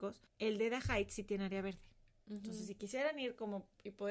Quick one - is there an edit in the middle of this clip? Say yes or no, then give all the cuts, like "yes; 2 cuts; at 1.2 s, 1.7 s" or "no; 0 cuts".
no; 0 cuts